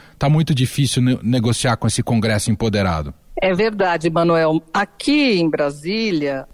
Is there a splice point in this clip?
no; 0 cuts

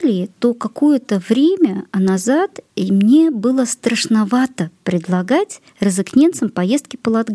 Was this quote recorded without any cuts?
no; 2 cuts; at 2.7 s, 5.7 s

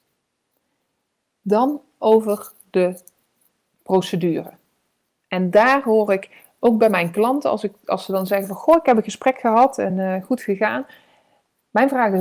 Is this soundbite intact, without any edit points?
yes; 0 cuts

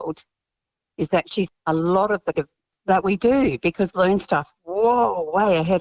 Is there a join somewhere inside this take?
yes; 4 cuts; at 1.5 s, 2.3 s, 2.7 s, 3.9 s

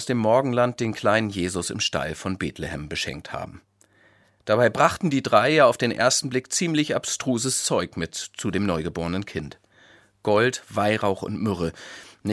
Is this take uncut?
yes; 0 cuts

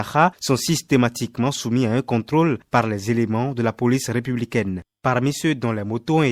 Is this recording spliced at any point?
no; 0 cuts

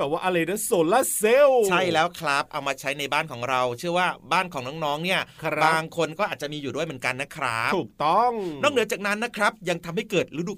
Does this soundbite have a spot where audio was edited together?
no; 0 cuts

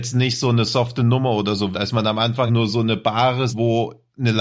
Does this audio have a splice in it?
yes; 3 cuts; at 1.7 s, 2.5 s, 3.5 s

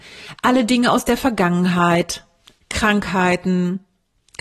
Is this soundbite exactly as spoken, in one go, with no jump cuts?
yes; 0 cuts

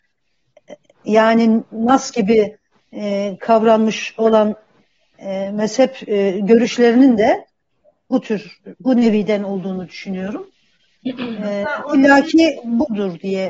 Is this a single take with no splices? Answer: yes; 0 cuts

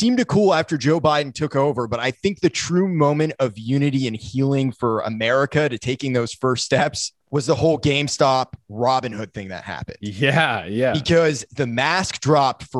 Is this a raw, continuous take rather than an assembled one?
no; 1 cut; at 7.2 s

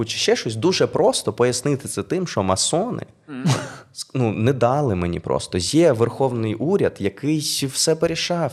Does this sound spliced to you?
no; 0 cuts

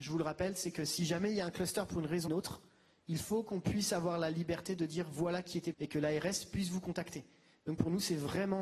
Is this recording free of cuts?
no; 2 cuts; at 2.3 s, 5.7 s

